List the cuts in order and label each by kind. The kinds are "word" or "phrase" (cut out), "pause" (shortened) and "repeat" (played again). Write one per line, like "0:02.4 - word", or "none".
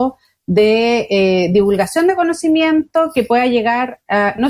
none